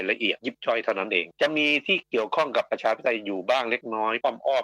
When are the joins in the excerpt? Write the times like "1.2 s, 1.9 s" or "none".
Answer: 1.3 s